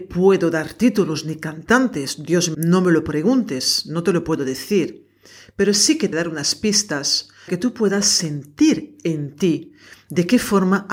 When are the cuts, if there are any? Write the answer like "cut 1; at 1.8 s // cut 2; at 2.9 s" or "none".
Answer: cut 1; at 2.5 s // cut 2; at 6.1 s // cut 3; at 7.5 s